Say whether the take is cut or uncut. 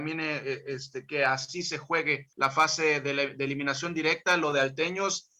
cut